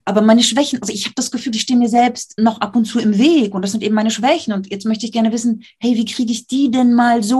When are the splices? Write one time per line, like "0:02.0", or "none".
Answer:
0:02.4

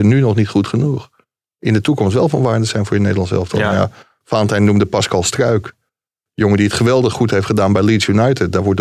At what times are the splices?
none

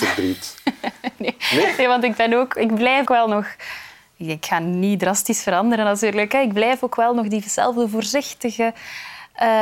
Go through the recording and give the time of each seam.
0:03.1

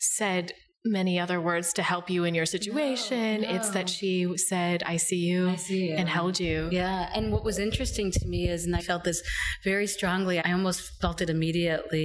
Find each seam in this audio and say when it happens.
0:08.8
0:10.4

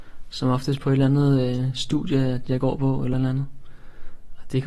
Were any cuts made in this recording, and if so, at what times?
none

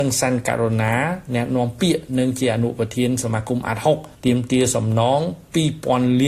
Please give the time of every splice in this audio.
0:04.1

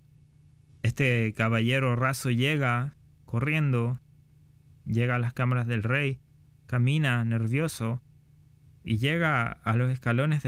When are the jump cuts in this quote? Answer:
none

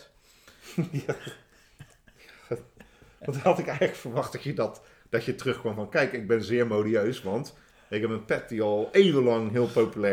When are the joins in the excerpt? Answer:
none

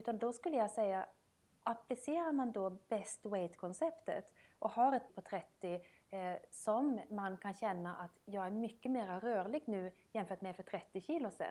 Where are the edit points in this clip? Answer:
0:05.1

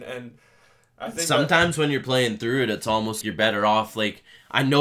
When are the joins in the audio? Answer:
0:03.2

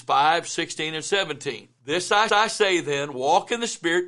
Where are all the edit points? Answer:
0:01.8
0:02.3

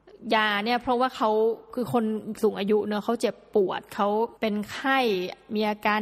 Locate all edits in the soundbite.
0:04.4

